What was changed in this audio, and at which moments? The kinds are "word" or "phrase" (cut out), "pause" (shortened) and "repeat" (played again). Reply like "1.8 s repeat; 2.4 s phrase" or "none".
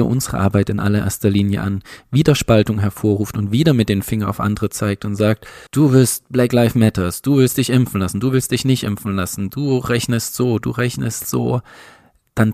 5.7 s pause